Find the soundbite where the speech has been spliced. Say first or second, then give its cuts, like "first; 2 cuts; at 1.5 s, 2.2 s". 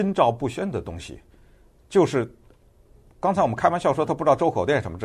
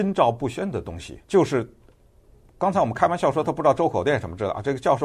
second; 1 cut; at 1.2 s